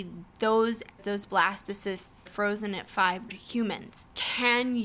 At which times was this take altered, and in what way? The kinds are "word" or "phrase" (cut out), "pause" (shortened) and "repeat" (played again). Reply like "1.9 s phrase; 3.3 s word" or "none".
1.0 s word; 2.3 s phrase; 3.3 s phrase